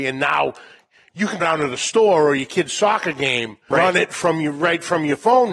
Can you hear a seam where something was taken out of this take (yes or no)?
yes